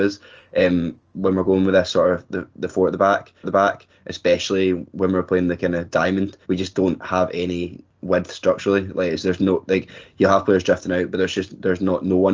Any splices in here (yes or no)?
yes